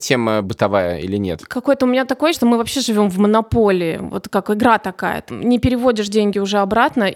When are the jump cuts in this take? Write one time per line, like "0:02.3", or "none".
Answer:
0:02.3
0:05.3